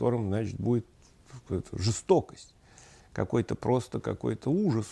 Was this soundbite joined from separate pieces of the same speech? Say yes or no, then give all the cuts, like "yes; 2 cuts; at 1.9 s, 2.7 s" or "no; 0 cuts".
no; 0 cuts